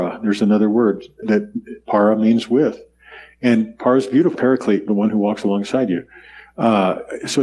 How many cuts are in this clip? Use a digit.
3